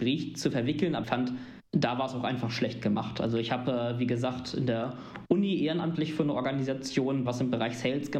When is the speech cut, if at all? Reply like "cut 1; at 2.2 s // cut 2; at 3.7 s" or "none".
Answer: cut 1; at 1.0 s // cut 2; at 1.7 s // cut 3; at 7.3 s